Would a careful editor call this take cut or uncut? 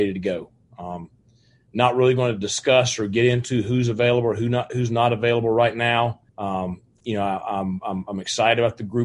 cut